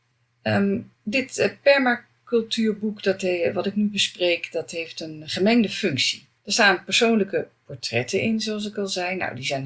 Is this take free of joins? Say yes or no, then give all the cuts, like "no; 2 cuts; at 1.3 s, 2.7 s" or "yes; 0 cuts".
no; 2 cuts; at 0.9 s, 6.4 s